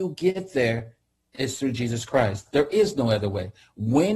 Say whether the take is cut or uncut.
uncut